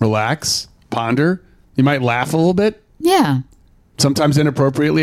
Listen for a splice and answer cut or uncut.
cut